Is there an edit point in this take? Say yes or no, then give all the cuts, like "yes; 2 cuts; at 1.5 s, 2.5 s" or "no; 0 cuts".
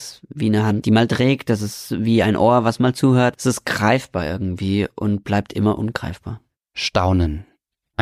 no; 0 cuts